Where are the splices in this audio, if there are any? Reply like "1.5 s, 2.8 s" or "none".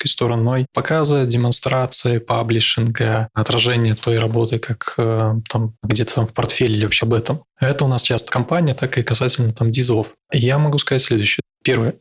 4.0 s, 5.8 s, 7.0 s, 8.3 s